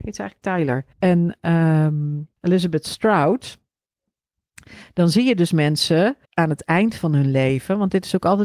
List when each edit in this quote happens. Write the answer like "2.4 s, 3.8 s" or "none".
0.9 s, 2.4 s, 6.2 s